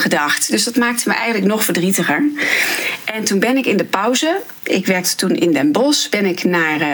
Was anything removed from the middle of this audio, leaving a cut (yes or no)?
no